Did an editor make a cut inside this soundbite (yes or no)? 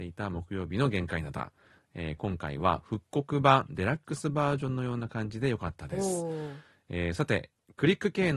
no